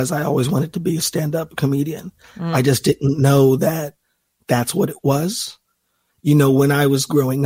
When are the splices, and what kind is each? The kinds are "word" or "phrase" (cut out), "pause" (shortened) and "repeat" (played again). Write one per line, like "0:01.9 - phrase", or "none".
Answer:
none